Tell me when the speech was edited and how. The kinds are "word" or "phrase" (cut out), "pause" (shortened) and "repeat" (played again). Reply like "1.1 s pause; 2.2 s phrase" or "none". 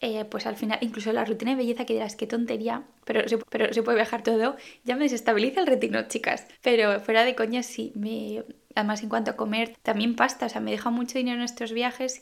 3.4 s repeat; 4.2 s word; 6.5 s pause; 9.7 s word

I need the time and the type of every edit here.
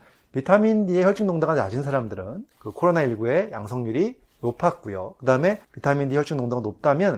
2.5 s pause; 5.6 s pause

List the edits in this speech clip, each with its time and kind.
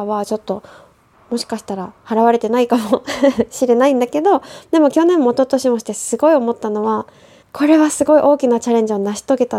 2.0 s pause; 7.4 s pause

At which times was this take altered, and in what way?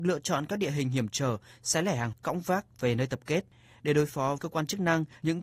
2.1 s word; 4.4 s word

